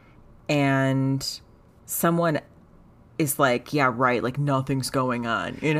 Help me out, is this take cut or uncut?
uncut